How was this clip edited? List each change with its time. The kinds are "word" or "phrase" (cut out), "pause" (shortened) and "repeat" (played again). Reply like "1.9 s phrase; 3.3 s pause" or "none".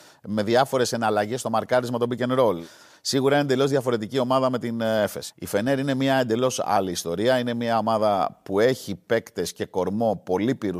none